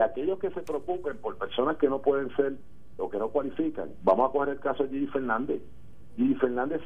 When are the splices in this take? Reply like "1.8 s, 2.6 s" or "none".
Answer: 3.0 s